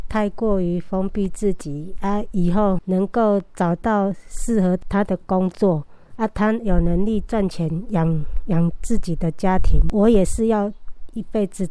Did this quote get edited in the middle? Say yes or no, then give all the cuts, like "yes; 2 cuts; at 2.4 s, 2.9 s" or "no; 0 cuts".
yes; 1 cut; at 2.8 s